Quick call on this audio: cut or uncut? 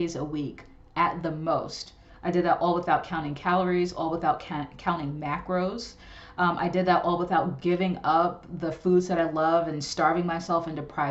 uncut